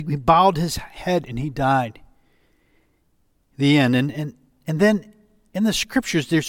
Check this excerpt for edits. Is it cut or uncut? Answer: uncut